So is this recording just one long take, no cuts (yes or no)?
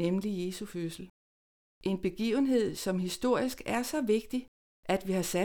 yes